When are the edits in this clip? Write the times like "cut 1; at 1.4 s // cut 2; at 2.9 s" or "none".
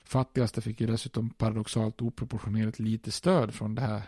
none